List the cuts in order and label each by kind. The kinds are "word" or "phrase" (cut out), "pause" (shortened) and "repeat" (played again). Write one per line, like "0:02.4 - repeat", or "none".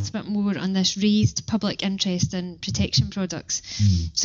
none